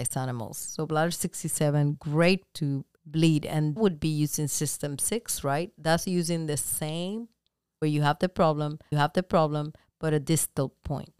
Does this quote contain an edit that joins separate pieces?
yes; 5 cuts; at 2.5 s, 3.0 s, 3.8 s, 7.8 s, 8.9 s

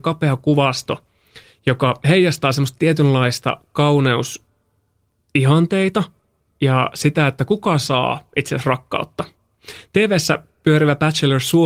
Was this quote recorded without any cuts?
yes; 0 cuts

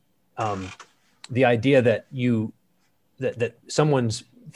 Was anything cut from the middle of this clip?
no; 0 cuts

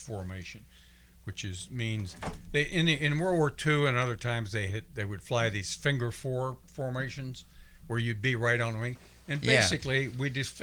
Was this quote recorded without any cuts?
yes; 0 cuts

